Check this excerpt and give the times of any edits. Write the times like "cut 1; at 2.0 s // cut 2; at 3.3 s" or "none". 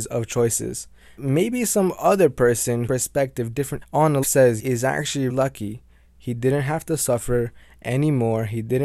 cut 1; at 1.2 s // cut 2; at 2.9 s // cut 3; at 3.8 s // cut 4; at 4.2 s // cut 5; at 4.6 s // cut 6; at 5.3 s